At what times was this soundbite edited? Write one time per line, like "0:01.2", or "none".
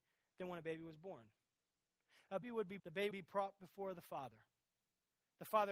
0:02.4
0:02.8
0:03.1